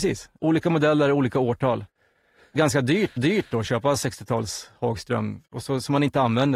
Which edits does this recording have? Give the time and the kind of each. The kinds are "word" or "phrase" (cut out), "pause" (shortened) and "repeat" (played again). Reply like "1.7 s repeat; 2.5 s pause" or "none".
2.6 s phrase; 3.2 s repeat; 5.5 s pause